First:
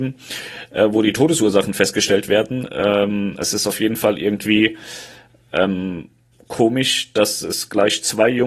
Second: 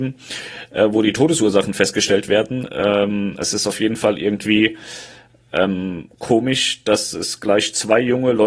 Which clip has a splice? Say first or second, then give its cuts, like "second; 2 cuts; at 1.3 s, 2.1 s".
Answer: second; 1 cut; at 6.1 s